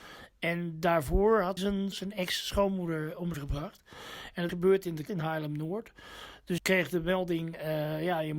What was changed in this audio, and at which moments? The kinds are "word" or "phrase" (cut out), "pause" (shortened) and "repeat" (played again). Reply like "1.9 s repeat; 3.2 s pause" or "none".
1.6 s word; 1.9 s word; 3.3 s word; 4.5 s word; 5.1 s word; 6.6 s word